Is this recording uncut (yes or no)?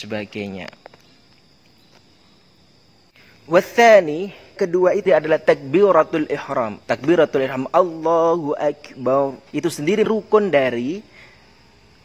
no